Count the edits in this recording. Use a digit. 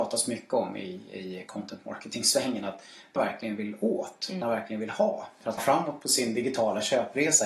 3